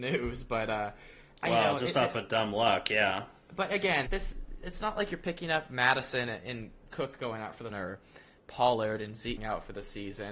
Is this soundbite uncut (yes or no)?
no